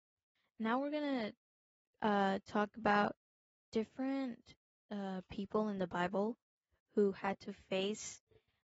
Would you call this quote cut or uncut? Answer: uncut